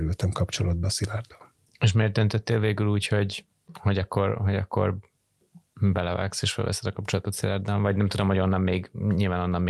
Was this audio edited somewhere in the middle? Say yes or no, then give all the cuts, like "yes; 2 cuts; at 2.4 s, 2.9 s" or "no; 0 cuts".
no; 0 cuts